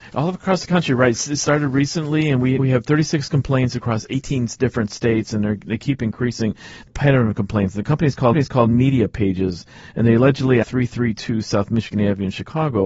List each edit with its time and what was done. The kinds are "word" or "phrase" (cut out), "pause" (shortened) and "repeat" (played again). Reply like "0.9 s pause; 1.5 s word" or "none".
2.6 s word; 6.9 s phrase; 8.3 s repeat; 10.6 s phrase